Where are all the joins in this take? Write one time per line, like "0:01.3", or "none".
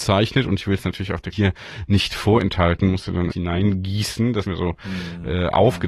0:01.3
0:03.3
0:04.4

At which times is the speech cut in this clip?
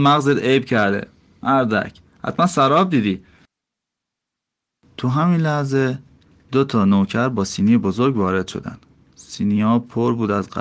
none

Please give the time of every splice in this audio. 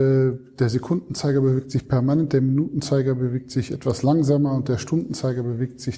none

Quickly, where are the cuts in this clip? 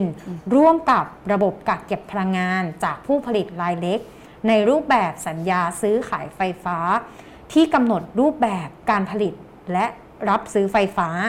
none

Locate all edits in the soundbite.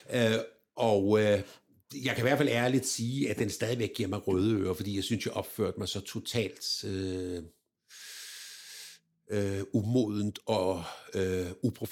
none

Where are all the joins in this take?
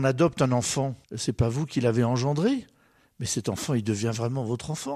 0:01.0

